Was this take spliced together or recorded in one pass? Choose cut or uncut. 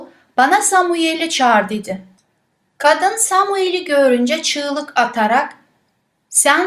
uncut